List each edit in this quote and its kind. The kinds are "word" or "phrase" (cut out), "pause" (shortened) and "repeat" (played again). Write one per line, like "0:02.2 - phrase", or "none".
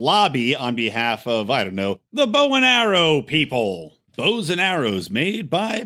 0:04.1 - pause